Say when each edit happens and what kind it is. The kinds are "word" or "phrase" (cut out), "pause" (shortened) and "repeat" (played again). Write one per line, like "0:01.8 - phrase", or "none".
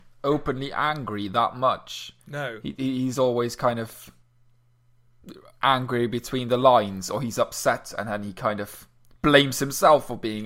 0:02.2 - pause